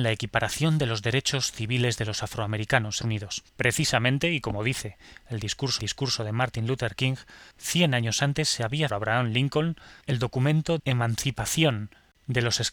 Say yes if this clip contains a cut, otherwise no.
yes